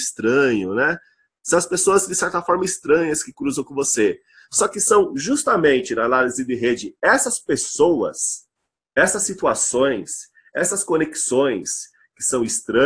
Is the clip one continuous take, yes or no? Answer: yes